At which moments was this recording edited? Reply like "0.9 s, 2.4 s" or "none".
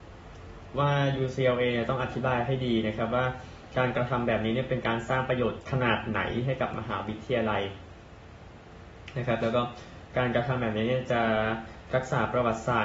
none